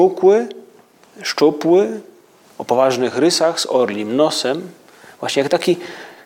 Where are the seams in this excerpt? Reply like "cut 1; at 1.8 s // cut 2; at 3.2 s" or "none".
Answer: none